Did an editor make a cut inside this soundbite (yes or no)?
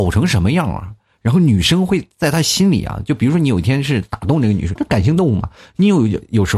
yes